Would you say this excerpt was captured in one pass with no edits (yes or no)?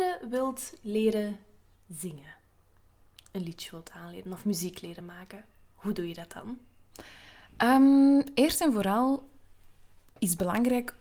yes